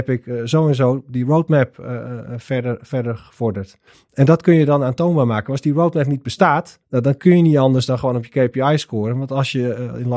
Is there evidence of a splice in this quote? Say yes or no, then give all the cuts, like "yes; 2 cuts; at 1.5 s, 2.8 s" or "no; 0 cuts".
yes; 2 cuts; at 3.9 s, 6.8 s